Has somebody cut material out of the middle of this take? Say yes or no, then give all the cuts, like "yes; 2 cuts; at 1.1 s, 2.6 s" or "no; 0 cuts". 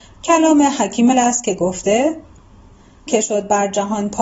yes; 2 cuts; at 1.1 s, 3.1 s